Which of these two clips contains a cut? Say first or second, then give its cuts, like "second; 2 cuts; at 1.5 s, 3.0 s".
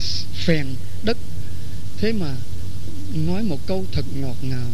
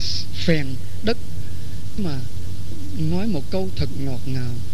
second; 1 cut; at 2.0 s